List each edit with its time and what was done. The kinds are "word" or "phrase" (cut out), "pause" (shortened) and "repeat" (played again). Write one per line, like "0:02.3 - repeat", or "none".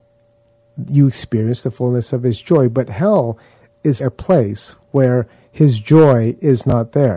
0:04.0 - word